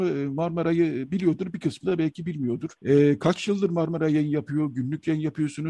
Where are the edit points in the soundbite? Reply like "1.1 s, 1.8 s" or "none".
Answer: 2.8 s